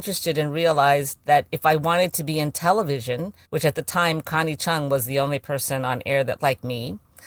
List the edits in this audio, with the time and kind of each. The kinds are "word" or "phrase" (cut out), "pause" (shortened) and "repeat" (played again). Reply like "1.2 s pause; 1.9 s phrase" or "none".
3.4 s pause; 6.4 s word